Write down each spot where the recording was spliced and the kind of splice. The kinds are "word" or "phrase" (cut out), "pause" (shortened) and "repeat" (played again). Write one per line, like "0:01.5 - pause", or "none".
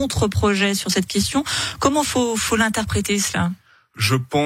none

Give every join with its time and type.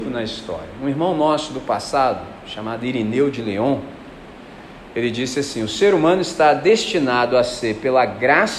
none

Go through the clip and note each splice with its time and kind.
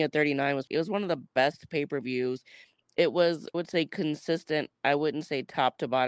0:03.5 - word

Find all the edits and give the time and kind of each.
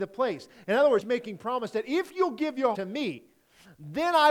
0:01.0 - word
0:02.7 - word

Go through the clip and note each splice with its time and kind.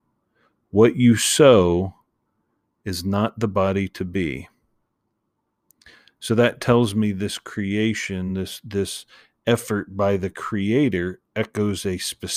none

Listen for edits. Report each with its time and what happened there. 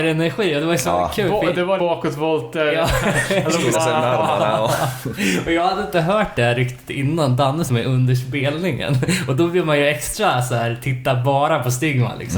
0:01.8 - word
0:03.7 - word
0:07.7 - phrase

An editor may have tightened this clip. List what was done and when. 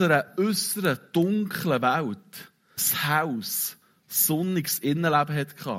0:02.8 - word

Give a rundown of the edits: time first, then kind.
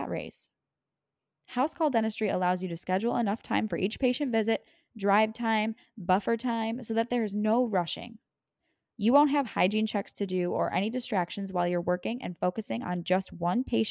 none

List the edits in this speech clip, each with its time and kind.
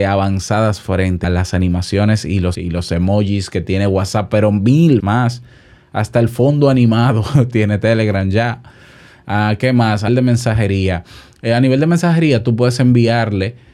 0:01.2 - word
0:02.5 - word
0:05.0 - word
0:10.1 - word

